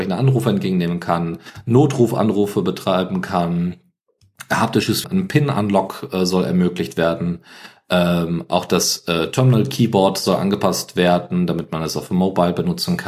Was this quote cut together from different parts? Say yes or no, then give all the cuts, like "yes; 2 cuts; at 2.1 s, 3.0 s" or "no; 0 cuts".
yes; 1 cut; at 5.0 s